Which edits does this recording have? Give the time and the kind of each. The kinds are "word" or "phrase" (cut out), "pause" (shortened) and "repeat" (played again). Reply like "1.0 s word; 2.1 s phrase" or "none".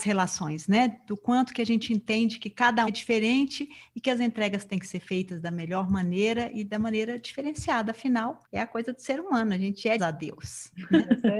2.9 s word; 8.4 s pause; 10.0 s phrase